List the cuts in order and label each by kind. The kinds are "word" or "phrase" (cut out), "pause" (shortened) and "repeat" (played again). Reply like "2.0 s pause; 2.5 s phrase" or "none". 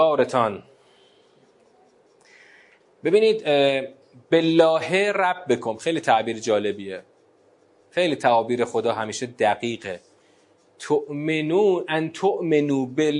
none